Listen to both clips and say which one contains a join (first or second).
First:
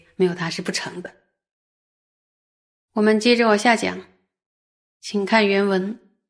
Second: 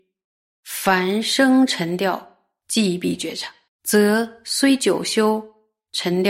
second